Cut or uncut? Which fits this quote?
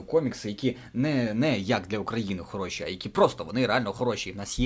uncut